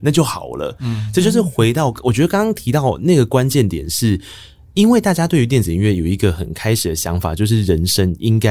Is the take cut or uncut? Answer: uncut